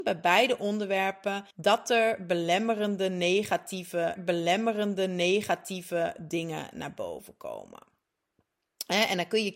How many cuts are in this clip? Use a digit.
2